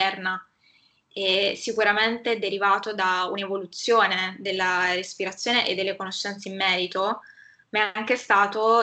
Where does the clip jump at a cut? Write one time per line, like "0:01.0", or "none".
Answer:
none